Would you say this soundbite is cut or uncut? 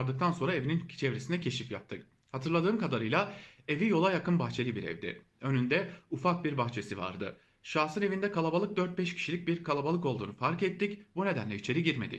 uncut